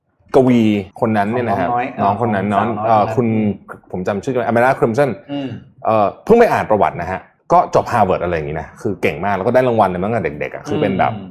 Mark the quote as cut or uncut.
cut